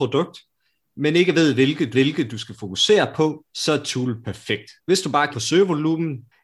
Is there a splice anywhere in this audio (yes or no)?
yes